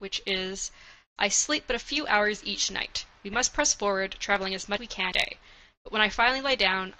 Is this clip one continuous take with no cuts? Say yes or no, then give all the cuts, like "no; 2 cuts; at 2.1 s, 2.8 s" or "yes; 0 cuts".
no; 2 cuts; at 4.8 s, 5.1 s